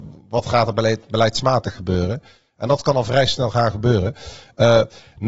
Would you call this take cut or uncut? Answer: uncut